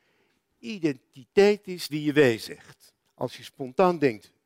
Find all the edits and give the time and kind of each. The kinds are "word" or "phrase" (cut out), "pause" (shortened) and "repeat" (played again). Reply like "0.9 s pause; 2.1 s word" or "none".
1.9 s word; 3.0 s pause